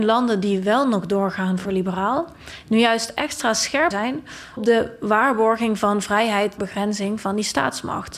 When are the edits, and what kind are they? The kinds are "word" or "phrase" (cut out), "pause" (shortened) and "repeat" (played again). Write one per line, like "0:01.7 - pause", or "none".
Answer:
0:03.9 - word
0:04.6 - word
0:06.6 - word